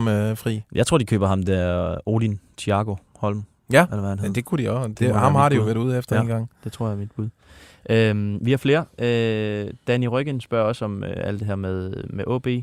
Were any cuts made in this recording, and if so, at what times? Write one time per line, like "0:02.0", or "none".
none